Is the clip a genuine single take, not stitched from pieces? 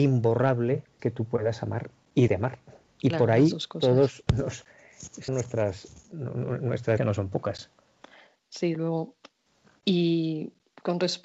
no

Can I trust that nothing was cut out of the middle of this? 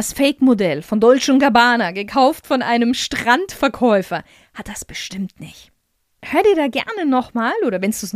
yes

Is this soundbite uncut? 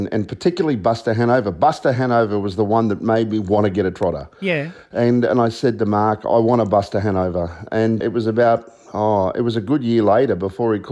no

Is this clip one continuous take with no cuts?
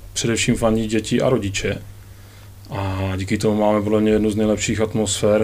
yes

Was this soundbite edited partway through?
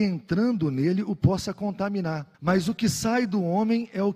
yes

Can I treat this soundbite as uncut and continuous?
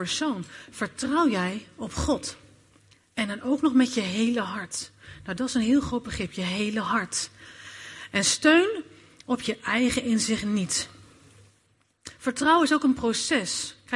yes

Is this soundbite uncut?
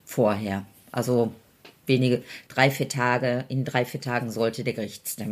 yes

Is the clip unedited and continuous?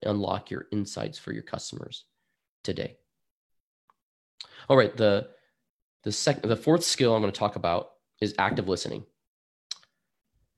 yes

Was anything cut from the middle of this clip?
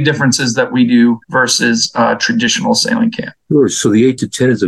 yes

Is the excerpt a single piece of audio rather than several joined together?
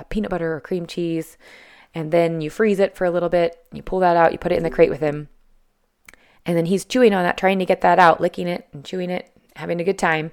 yes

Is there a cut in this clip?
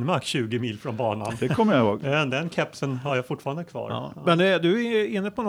no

